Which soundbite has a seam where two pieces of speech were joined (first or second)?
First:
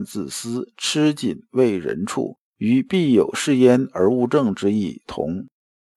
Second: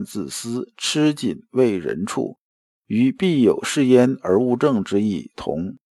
first